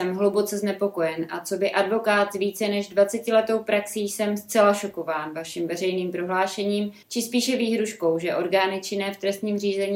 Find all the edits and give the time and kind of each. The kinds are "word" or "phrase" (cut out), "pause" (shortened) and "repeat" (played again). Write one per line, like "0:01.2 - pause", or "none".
0:07.0 - pause